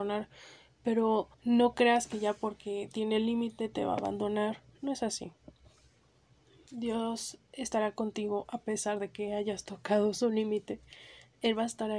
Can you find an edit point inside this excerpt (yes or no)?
yes